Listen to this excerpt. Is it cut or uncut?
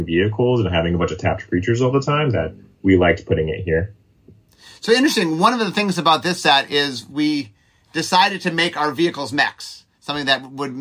uncut